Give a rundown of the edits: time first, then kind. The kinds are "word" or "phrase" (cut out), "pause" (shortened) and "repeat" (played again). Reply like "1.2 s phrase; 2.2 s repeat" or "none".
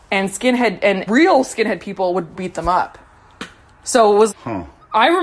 1.1 s word; 2.3 s phrase; 4.3 s word